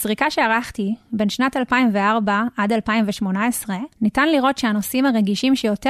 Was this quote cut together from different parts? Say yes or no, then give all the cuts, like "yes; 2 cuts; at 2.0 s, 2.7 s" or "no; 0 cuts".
yes; 1 cut; at 3.9 s